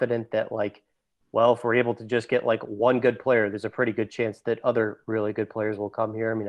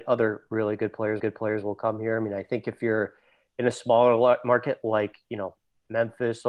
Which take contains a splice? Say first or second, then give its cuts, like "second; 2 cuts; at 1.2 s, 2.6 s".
second; 1 cut; at 1.2 s